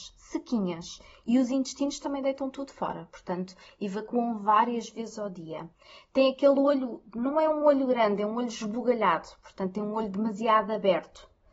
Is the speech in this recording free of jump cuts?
yes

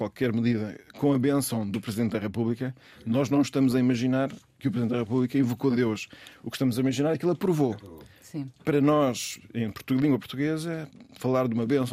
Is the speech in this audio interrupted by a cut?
no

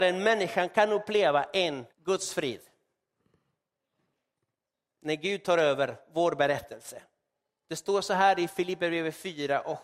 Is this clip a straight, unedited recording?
no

